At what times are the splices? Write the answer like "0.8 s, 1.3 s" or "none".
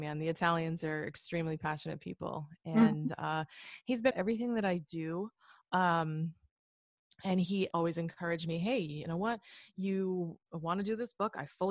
4.1 s, 7.7 s